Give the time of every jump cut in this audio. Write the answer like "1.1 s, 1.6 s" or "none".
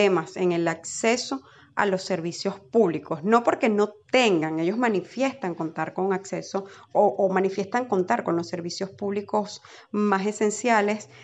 none